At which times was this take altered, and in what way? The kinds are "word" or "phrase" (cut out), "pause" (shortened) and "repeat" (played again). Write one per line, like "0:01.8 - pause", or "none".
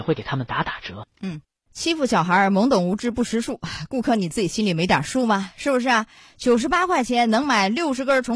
none